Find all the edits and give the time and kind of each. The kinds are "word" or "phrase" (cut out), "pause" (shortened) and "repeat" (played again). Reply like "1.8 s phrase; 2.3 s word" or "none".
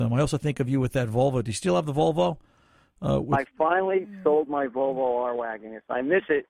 none